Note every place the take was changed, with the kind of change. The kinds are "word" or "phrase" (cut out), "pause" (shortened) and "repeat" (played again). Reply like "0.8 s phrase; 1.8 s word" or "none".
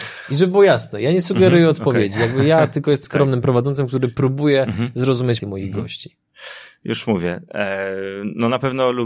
3.0 s word; 5.4 s word